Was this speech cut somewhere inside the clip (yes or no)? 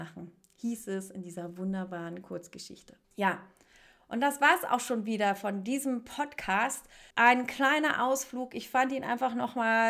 yes